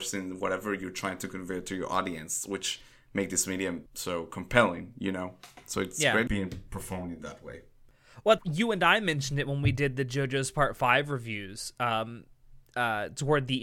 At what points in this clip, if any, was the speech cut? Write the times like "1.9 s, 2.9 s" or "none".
3.9 s, 6.3 s, 8.4 s